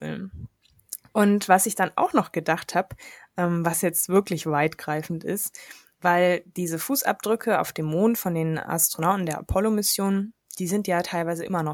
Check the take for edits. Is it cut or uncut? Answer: uncut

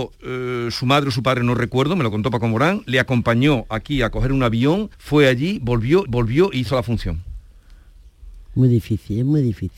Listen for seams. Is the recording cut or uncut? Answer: cut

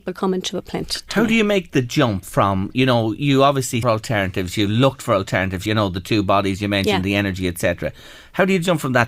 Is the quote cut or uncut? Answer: cut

